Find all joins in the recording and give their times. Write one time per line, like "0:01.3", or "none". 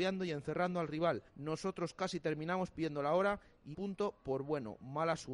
0:01.3
0:03.7